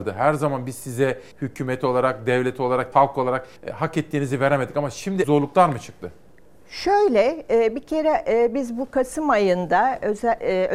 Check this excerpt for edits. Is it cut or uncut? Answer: cut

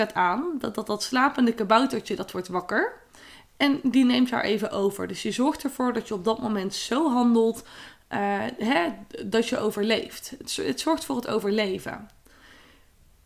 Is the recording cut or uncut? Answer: uncut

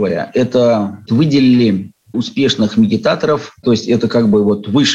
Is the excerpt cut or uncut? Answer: cut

